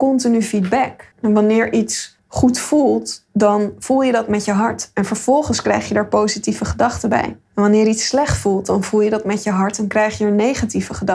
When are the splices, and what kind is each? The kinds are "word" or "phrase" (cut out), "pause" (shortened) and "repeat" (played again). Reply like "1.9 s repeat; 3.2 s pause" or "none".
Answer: 1.1 s pause; 2.2 s pause; 7.5 s pause